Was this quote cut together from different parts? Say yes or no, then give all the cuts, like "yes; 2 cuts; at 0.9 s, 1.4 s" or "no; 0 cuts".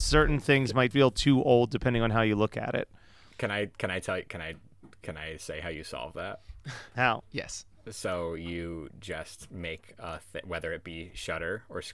yes; 1 cut; at 0.9 s